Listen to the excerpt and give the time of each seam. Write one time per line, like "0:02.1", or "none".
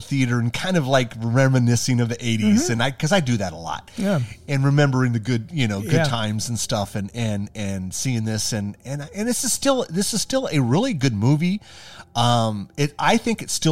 none